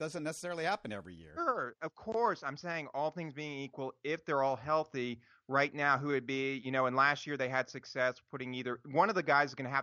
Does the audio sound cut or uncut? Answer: uncut